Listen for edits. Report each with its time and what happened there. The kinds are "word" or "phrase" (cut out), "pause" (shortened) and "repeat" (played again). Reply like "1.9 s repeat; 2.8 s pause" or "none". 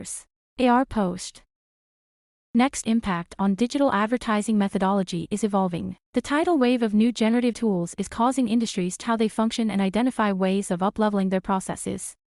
2.8 s phrase; 6.0 s pause; 7.5 s word; 9.0 s word